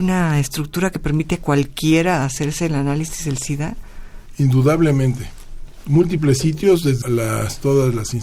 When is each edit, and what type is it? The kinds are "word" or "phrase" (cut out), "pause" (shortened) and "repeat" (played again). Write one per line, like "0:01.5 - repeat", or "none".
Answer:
0:07.0 - word